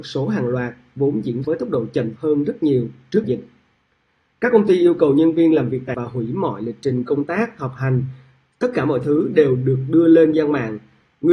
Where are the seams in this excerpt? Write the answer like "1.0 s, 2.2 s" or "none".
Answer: 1.4 s, 2.2 s, 3.2 s, 5.9 s, 10.3 s